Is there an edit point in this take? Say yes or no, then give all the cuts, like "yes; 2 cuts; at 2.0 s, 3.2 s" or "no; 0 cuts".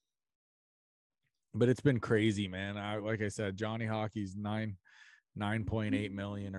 no; 0 cuts